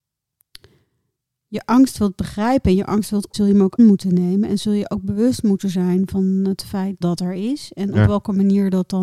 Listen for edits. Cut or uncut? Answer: cut